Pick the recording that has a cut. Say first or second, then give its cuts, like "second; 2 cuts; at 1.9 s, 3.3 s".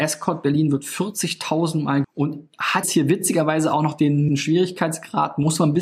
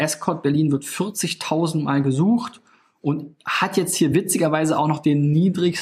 first; 3 cuts; at 2.0 s, 2.8 s, 4.3 s